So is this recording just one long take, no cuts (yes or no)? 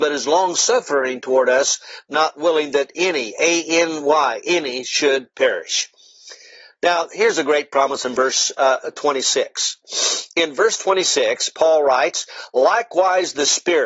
yes